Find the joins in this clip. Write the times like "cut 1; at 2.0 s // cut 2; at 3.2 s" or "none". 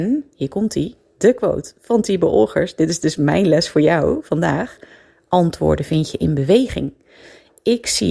none